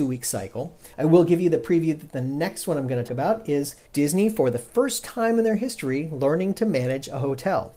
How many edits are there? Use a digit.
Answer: 3